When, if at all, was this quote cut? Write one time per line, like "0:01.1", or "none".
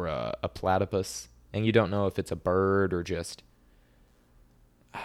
none